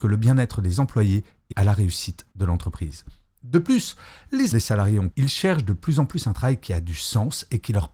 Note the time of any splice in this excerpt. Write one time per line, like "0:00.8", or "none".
0:01.5
0:02.3
0:04.5
0:05.1